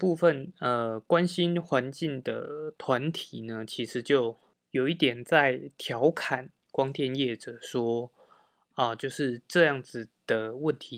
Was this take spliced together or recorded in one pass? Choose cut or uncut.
uncut